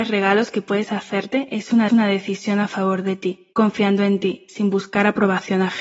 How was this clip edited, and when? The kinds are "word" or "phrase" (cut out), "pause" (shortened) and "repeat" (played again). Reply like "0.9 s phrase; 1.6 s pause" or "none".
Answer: 1.9 s repeat; 3.5 s pause